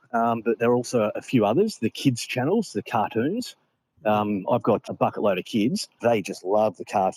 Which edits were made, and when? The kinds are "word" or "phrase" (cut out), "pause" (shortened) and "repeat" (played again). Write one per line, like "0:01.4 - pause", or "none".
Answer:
0:04.9 - word
0:06.0 - word